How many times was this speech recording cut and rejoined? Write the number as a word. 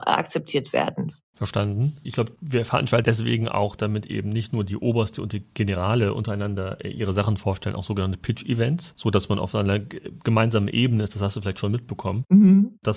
zero